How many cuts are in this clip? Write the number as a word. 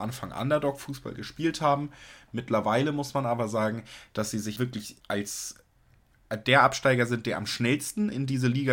two